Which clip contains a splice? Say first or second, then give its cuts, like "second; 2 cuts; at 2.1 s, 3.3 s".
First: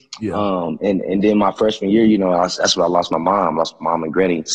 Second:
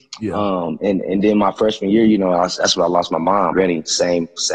second; 1 cut; at 3.5 s